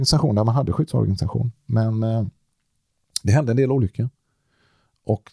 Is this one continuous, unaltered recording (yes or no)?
yes